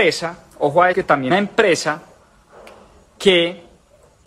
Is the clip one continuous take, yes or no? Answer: no